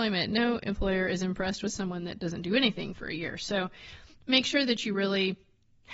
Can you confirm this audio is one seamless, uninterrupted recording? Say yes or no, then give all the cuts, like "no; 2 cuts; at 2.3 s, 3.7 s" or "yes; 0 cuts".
yes; 0 cuts